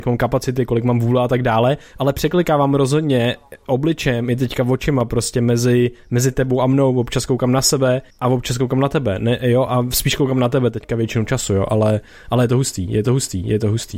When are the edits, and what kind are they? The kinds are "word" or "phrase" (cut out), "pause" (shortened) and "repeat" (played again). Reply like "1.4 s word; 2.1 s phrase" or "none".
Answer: 8.1 s pause; 13.1 s repeat